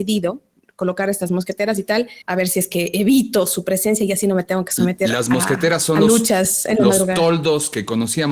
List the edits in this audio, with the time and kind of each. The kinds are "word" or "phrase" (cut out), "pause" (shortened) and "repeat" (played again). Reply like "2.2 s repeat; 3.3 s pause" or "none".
2.2 s pause